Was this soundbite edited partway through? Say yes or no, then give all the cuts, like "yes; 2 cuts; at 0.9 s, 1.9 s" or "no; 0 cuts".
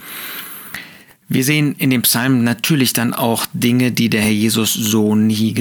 no; 0 cuts